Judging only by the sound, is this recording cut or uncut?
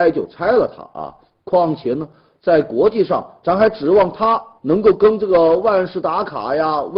uncut